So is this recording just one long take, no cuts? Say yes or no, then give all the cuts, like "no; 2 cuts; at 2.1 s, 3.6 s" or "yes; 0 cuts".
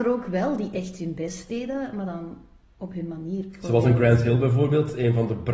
yes; 0 cuts